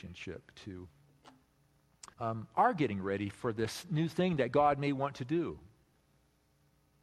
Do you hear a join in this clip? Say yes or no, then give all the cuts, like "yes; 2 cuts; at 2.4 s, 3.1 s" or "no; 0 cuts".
yes; 1 cut; at 2.1 s